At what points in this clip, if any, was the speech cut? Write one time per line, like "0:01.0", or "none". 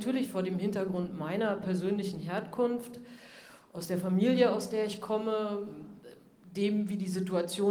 none